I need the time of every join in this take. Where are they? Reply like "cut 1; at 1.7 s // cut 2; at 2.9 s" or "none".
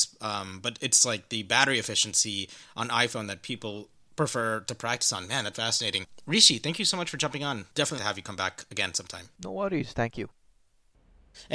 cut 1; at 5.5 s // cut 2; at 8.0 s